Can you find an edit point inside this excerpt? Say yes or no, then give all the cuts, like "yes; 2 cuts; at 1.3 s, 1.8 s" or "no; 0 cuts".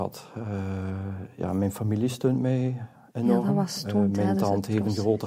no; 0 cuts